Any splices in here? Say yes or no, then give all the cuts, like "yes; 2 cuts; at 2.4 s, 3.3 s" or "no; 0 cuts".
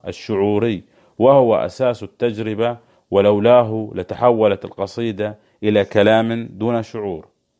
no; 0 cuts